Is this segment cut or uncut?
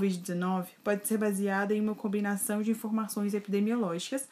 uncut